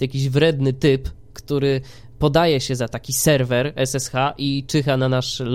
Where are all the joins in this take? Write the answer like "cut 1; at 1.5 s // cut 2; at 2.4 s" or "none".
none